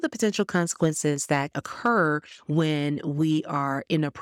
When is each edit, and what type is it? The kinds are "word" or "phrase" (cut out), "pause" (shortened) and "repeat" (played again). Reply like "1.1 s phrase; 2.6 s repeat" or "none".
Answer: 1.5 s word

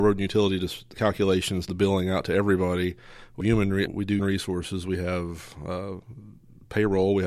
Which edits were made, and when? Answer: 0.9 s word; 1.7 s word; 3.4 s word; 3.9 s word; 4.2 s word

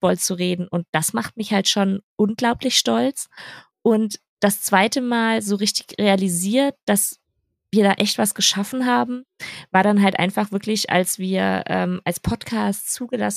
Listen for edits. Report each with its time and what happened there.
none

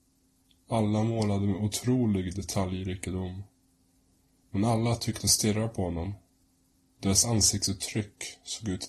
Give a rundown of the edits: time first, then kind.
none

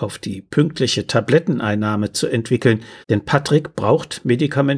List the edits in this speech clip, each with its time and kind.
3.0 s pause

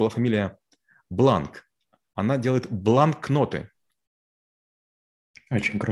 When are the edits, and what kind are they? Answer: none

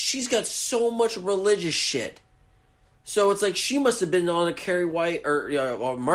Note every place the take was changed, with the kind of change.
none

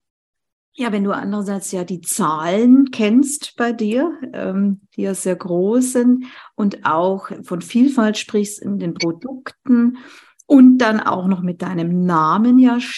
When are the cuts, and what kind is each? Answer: none

